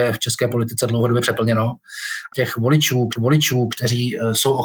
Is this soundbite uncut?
no; 2 cuts; at 2.3 s, 3.2 s

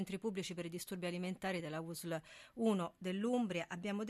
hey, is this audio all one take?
yes; 0 cuts

